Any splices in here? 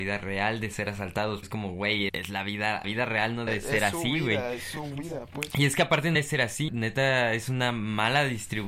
yes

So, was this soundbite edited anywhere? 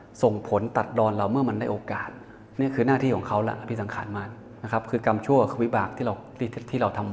yes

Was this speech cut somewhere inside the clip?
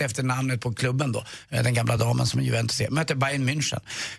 no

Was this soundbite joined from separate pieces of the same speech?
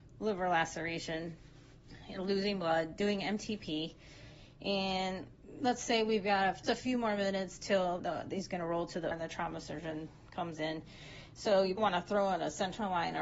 yes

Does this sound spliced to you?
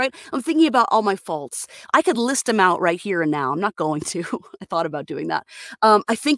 no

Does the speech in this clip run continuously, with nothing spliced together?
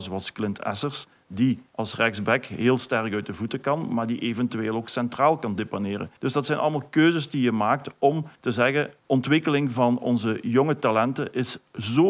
no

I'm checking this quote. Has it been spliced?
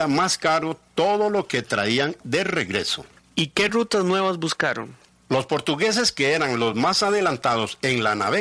no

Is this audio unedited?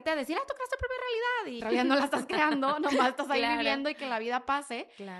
no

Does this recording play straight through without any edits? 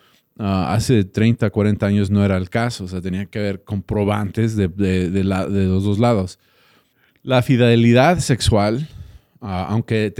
no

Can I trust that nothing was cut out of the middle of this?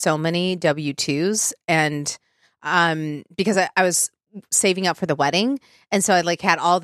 yes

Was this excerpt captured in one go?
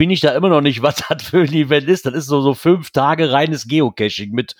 yes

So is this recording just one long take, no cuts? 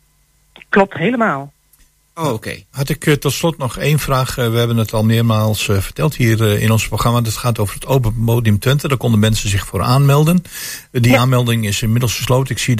yes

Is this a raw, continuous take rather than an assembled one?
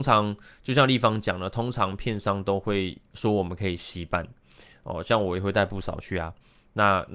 yes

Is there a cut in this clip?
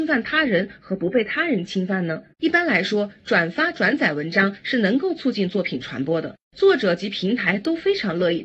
yes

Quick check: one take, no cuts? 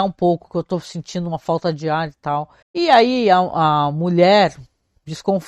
no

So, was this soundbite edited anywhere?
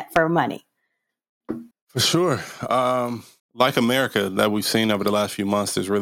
yes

